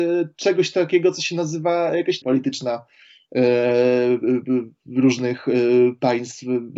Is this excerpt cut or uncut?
cut